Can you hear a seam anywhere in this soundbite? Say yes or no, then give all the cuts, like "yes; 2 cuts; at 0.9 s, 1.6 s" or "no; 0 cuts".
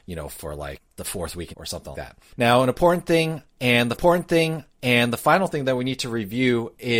yes; 3 cuts; at 1.5 s, 1.9 s, 3.9 s